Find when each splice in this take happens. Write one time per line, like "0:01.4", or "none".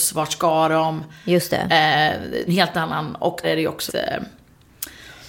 0:02.5
0:03.4
0:03.9